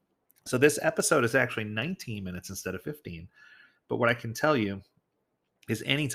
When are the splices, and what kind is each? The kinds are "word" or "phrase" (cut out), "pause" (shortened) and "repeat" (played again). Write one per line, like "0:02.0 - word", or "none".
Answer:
none